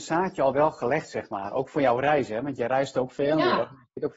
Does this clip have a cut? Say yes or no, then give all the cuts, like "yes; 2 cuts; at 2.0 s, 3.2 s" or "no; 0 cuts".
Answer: no; 0 cuts